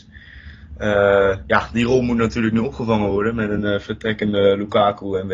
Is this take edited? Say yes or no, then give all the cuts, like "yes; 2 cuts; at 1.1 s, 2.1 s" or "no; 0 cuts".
no; 0 cuts